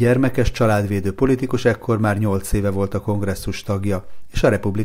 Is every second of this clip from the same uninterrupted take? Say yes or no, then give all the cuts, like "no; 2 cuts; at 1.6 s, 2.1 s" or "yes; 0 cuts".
yes; 0 cuts